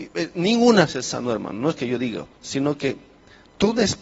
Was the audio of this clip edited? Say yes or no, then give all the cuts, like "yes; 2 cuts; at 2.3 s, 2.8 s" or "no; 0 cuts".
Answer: no; 0 cuts